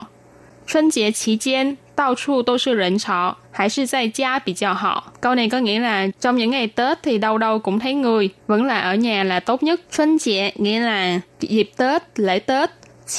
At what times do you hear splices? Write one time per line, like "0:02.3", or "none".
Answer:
0:03.4
0:05.1
0:06.2
0:08.4
0:09.8
0:11.3